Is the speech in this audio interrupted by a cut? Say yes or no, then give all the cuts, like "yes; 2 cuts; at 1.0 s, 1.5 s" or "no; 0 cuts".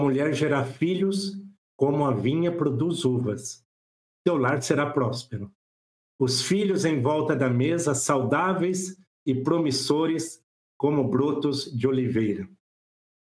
no; 0 cuts